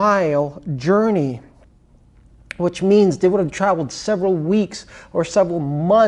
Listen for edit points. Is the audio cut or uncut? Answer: uncut